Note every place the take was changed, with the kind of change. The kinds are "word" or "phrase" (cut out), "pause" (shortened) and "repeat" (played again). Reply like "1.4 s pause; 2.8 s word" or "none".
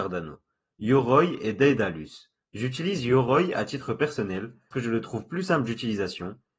2.4 s pause; 4.7 s word